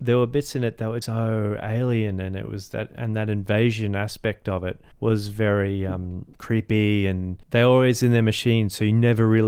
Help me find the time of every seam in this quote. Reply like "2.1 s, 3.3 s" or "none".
1.0 s, 4.9 s, 6.3 s, 7.4 s